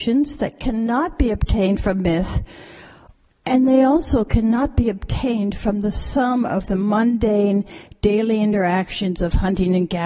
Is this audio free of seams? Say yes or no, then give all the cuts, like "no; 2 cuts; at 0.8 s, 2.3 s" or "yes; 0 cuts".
yes; 0 cuts